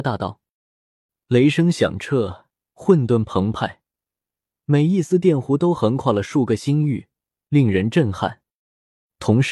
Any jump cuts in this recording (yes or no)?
no